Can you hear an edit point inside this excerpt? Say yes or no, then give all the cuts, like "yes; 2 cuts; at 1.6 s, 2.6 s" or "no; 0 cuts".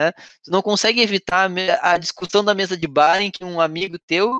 no; 0 cuts